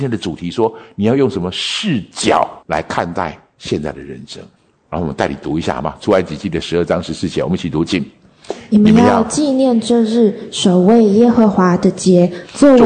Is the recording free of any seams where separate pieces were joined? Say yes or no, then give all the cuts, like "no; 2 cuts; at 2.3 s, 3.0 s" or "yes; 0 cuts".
no; 2 cuts; at 2.6 s, 4.6 s